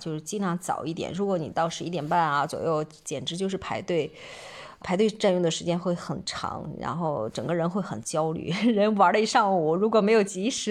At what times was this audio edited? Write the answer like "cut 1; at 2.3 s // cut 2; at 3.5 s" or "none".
cut 1; at 4.8 s